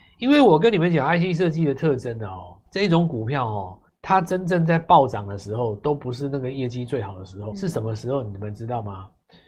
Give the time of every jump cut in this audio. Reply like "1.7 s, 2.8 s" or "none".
2.7 s, 3.9 s, 7.5 s